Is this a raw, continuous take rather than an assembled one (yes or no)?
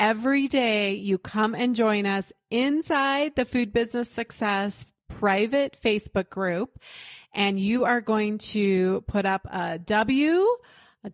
yes